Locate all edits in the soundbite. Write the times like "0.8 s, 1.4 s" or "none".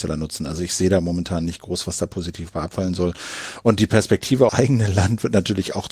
4.5 s